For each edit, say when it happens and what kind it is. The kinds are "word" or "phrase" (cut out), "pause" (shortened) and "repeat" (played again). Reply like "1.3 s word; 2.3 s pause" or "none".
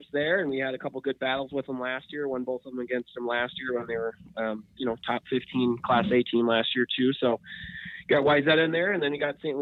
none